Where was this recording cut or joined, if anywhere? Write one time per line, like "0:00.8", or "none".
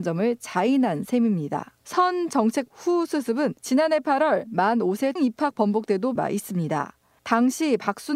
0:01.8
0:02.7
0:03.6
0:05.2
0:06.2